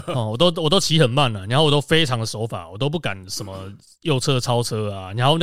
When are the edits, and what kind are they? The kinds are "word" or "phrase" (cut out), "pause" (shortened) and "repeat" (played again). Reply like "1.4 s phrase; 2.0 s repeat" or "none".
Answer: none